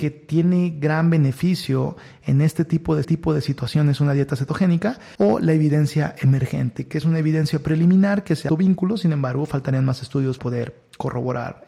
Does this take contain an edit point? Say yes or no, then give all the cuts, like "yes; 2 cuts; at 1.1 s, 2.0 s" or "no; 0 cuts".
yes; 4 cuts; at 3.0 s, 5.2 s, 8.5 s, 10.4 s